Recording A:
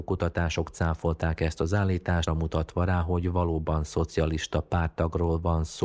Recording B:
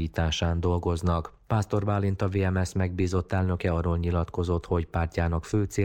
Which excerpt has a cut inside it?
A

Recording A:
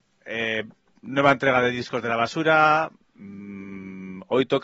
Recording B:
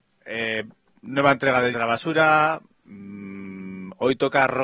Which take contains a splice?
B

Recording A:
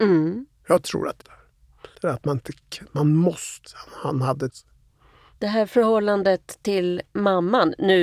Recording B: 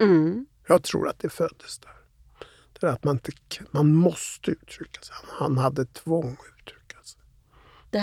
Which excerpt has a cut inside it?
A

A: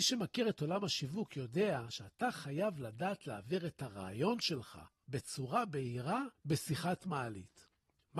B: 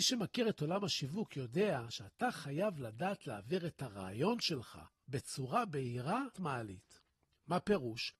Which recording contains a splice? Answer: B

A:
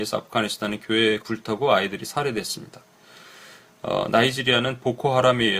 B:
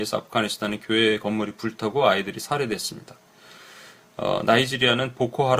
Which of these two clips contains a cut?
A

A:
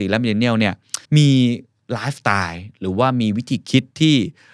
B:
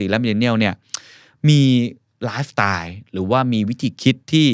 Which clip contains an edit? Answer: A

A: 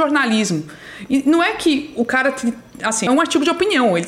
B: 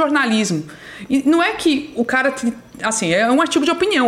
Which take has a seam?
A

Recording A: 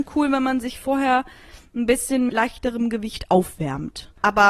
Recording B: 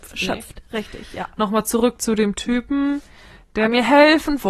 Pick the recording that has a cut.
A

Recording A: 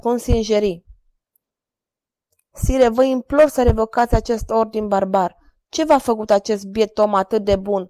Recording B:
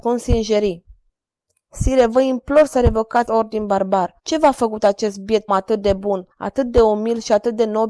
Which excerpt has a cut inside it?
B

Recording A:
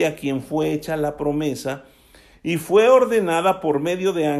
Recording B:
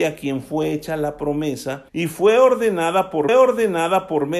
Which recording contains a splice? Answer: B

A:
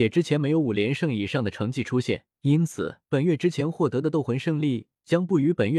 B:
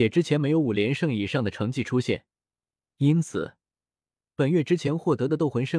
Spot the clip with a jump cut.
A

